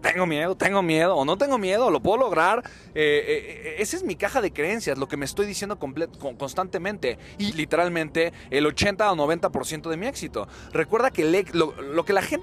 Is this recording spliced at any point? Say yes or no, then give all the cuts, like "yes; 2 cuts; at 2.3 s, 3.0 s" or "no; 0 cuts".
yes; 1 cut; at 7.5 s